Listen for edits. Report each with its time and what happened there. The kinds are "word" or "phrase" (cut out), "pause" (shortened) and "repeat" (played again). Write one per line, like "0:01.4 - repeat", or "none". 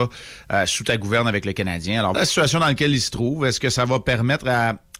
0:02.1 - word